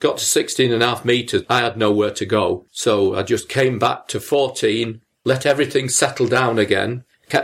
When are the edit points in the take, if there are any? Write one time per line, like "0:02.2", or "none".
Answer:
0:02.7